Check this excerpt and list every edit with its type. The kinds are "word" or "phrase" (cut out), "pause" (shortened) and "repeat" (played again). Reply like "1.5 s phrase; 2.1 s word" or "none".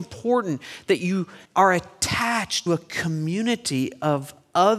1.4 s pause; 2.7 s word